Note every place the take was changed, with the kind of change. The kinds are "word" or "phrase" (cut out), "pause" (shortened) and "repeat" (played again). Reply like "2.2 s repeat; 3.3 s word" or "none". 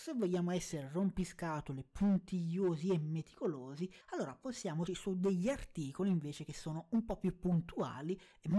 4.0 s pause; 4.9 s word